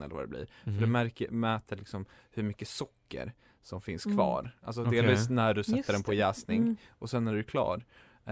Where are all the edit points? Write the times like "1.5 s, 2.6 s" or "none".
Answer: none